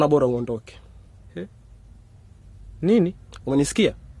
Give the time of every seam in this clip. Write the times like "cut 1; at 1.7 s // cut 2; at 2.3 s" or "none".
none